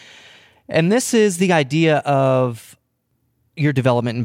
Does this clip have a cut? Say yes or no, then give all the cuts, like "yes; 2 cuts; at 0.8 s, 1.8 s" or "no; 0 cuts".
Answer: no; 0 cuts